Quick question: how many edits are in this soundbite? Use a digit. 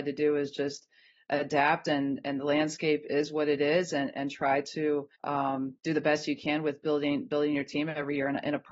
1